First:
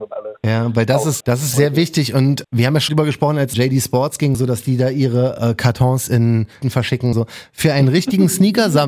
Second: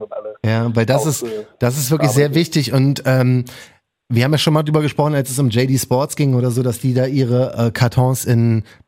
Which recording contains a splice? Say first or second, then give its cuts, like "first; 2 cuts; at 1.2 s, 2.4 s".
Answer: first; 8 cuts; at 1.2 s, 1.5 s, 2.4 s, 2.9 s, 3.5 s, 4.3 s, 6.6 s, 7.1 s